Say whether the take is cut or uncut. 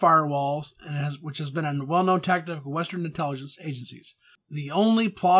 uncut